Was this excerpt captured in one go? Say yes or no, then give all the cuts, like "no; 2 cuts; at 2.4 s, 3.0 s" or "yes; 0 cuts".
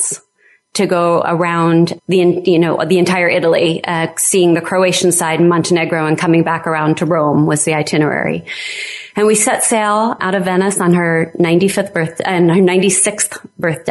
no; 2 cuts; at 2.0 s, 10.2 s